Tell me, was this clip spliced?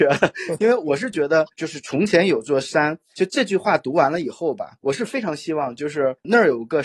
yes; 2 cuts; at 1.5 s, 3.1 s

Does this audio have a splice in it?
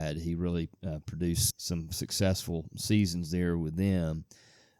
yes; 1 cut; at 1.5 s

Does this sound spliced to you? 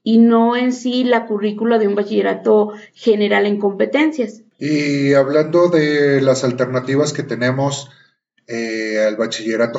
no; 0 cuts

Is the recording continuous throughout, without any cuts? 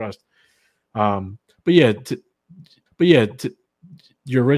no; 1 cut; at 2.9 s

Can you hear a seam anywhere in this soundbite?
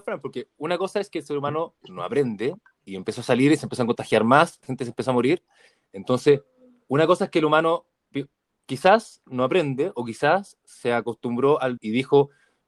yes; 3 cuts; at 1.8 s, 4.6 s, 11.8 s

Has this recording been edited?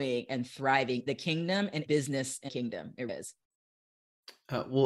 yes; 4 cuts; at 1.1 s, 1.9 s, 2.5 s, 3.1 s

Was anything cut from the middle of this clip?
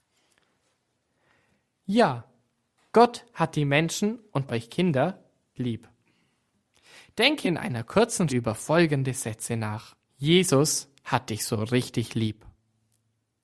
yes; 5 cuts; at 4.5 s, 5.6 s, 7.4 s, 8.3 s, 10.0 s

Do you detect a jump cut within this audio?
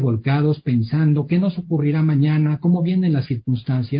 no; 0 cuts

